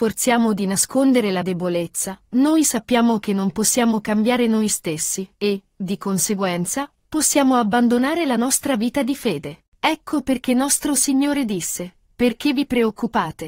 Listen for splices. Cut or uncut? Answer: cut